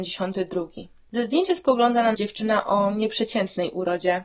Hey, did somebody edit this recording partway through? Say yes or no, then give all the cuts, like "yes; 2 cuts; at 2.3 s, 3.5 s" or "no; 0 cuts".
yes; 1 cut; at 2.1 s